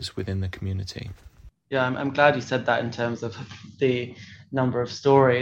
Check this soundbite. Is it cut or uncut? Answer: cut